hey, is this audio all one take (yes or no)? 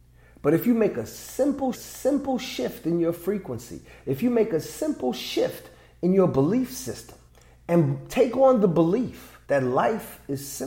no